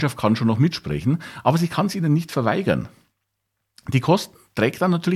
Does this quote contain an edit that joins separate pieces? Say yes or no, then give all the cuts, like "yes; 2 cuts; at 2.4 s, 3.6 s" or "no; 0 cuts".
no; 0 cuts